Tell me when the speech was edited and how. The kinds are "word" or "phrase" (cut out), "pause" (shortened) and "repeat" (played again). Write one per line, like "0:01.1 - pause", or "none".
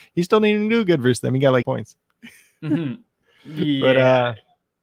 0:01.6 - word